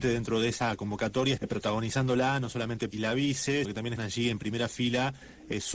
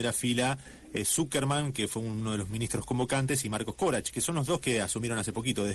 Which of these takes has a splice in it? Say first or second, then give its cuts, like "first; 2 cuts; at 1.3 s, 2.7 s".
first; 4 cuts; at 1.4 s, 2.9 s, 3.6 s, 4.0 s